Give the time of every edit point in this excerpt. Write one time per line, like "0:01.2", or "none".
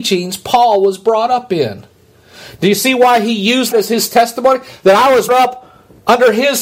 0:03.7
0:05.3